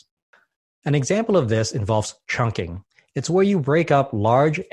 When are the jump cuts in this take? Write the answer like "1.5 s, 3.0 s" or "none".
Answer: none